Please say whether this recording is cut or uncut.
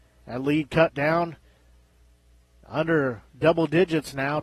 uncut